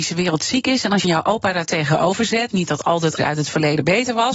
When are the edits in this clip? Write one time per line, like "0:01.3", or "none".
0:01.0
0:03.2